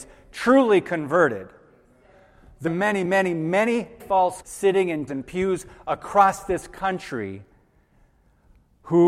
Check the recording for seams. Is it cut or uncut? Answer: cut